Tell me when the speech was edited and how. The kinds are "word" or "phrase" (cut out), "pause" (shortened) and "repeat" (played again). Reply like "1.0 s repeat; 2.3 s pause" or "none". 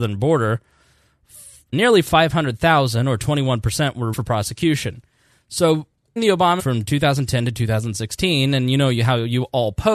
1.7 s word; 4.1 s word; 6.2 s word; 6.6 s word